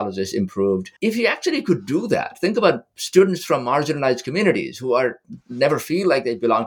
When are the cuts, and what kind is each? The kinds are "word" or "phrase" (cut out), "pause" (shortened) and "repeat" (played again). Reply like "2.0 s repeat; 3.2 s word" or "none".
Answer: 1.0 s pause